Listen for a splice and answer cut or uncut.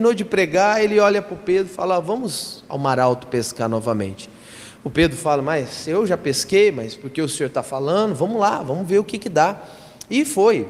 uncut